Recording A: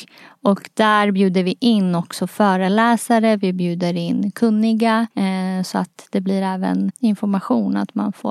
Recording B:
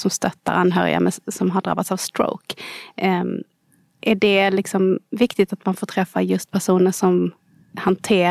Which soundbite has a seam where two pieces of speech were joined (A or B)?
A